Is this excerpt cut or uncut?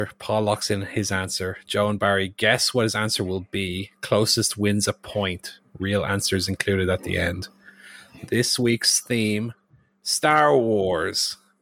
uncut